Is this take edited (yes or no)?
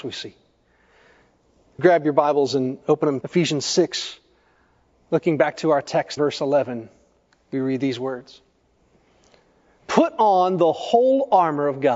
yes